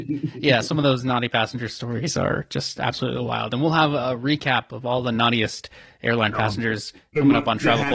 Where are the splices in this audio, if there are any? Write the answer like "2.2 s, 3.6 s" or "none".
none